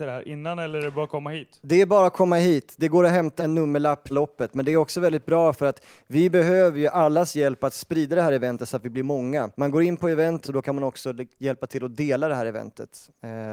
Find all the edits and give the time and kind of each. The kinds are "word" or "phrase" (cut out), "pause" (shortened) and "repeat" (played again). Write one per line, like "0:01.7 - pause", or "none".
0:03.4 - word
0:04.1 - phrase
0:09.5 - pause
0:10.4 - phrase